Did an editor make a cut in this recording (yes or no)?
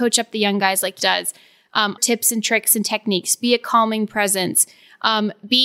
yes